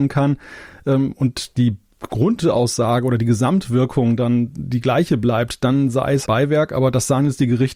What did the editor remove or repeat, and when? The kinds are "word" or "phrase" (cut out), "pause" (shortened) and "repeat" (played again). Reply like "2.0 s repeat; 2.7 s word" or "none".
6.3 s word

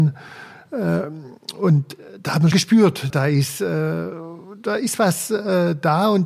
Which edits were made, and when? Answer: 2.5 s word; 3.1 s word

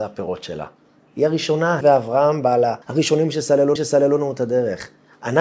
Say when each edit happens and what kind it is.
1.8 s word; 2.8 s pause; 3.8 s repeat

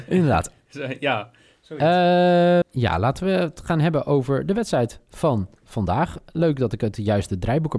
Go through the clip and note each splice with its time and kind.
2.6 s word; 5.6 s pause

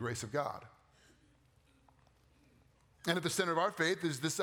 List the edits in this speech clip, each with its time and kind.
none

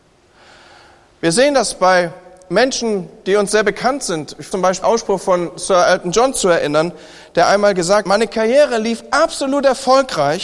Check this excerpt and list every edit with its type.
4.5 s word; 4.8 s word; 8.0 s word

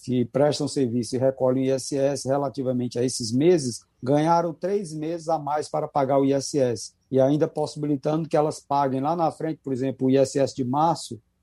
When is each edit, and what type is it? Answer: 3.9 s pause; 7.0 s pause

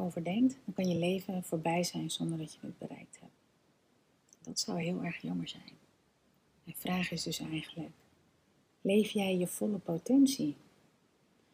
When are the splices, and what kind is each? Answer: none

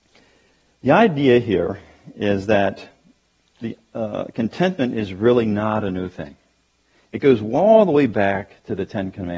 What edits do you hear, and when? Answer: none

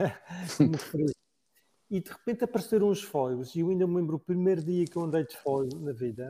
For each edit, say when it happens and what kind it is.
none

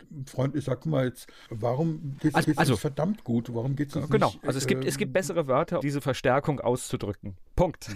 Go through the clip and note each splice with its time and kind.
2.4 s repeat; 5.8 s word

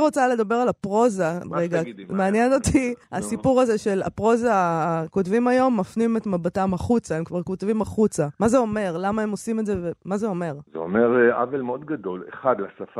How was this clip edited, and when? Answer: 3.0 s pause; 8.3 s pause; 10.7 s pause

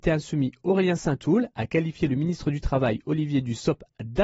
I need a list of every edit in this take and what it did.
none

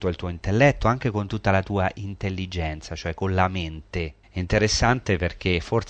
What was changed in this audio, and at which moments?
4.2 s pause

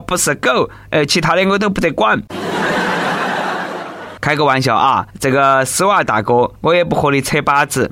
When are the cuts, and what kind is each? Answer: 5.1 s pause; 6.5 s pause

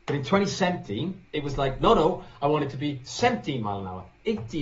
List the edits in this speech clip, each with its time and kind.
1.2 s pause

